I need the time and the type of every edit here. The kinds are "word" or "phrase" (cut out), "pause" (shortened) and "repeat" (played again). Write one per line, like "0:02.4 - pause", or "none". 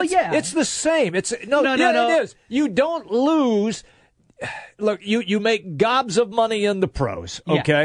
0:01.6 - phrase